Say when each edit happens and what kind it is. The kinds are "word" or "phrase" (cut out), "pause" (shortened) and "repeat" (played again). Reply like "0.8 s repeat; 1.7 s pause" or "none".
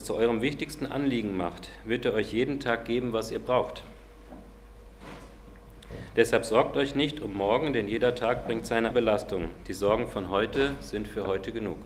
8.9 s word